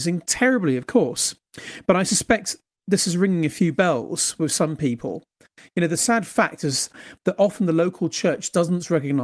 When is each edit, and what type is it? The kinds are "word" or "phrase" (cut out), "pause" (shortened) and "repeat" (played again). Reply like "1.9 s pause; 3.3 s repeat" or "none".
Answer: none